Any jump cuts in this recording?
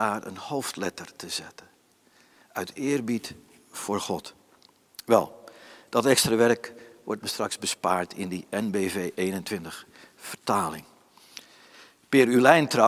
no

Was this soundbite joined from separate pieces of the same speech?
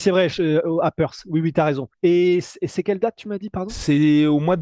yes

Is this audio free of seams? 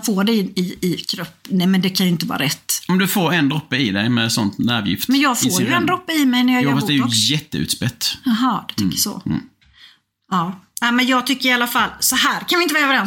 yes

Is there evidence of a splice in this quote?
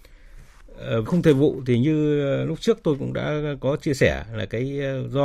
yes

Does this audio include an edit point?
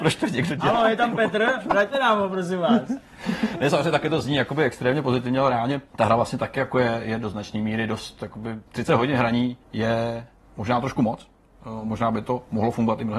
yes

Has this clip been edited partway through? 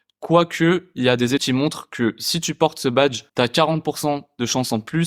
yes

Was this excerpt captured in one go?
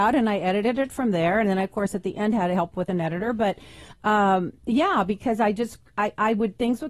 yes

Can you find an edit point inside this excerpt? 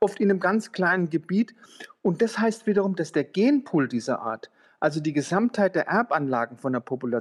no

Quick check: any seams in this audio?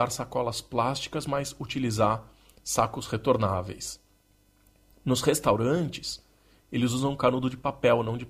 no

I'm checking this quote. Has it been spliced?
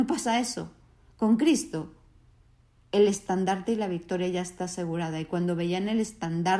no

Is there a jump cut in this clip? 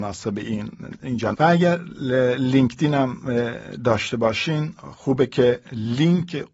yes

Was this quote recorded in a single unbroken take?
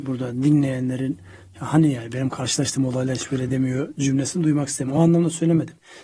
yes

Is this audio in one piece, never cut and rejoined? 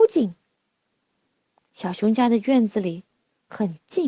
yes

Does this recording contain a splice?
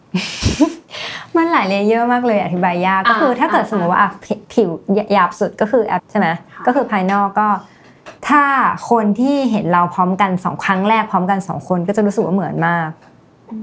yes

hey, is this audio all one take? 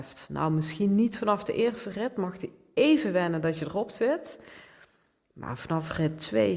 yes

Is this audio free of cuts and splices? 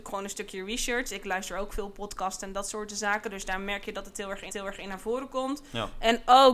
no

